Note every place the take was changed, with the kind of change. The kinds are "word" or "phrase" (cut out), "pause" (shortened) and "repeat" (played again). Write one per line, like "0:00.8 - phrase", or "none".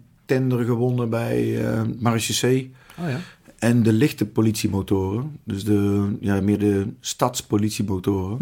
none